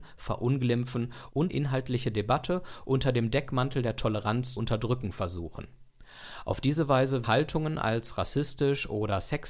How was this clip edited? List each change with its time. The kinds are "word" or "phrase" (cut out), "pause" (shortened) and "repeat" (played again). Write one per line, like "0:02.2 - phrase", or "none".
0:01.5 - word
0:04.6 - word
0:07.2 - word